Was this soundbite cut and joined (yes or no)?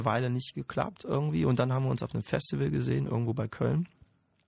no